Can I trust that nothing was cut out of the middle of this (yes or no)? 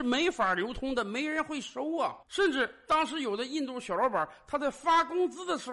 no